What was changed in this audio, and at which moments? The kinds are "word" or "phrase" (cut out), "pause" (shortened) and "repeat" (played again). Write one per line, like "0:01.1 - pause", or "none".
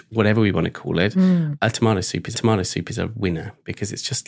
0:02.3 - repeat